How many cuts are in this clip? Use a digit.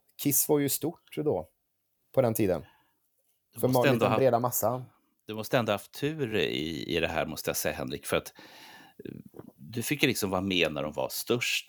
0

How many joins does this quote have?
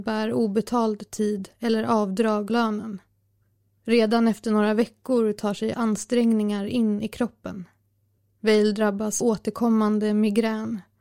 5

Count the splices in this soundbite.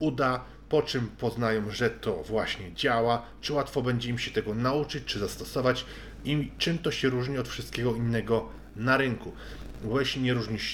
0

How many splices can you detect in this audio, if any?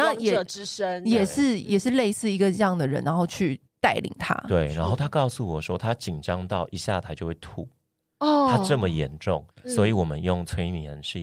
2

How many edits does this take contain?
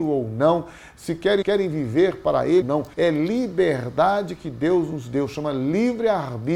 3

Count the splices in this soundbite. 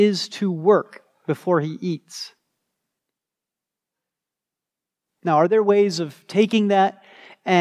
0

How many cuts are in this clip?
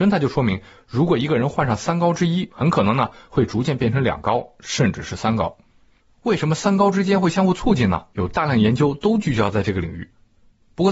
3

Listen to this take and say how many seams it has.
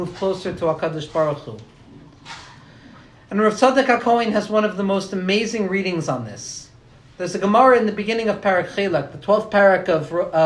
0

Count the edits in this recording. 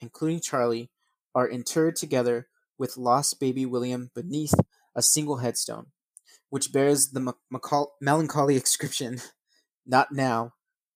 0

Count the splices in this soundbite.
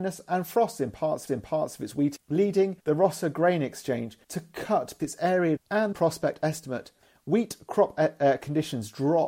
8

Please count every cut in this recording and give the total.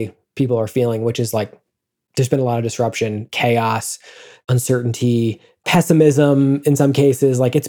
0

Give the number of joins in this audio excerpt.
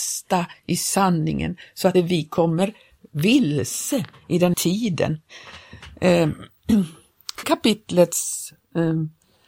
3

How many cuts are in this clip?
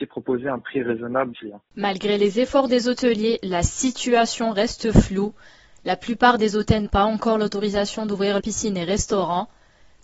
3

